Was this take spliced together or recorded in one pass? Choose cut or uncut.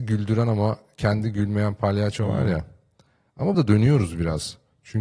cut